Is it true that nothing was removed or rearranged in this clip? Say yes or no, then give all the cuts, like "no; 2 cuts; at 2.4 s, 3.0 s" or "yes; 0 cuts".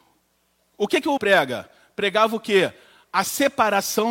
no; 1 cut; at 1.2 s